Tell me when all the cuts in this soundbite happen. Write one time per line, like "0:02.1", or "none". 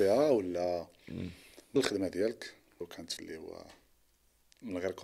0:01.8
0:02.8
0:03.2